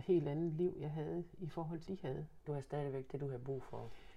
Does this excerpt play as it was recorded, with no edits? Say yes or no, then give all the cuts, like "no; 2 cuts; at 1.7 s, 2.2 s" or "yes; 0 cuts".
no; 1 cut; at 1.9 s